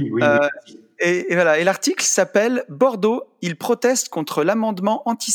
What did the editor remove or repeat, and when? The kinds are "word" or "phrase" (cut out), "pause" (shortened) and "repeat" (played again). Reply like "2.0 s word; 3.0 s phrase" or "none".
none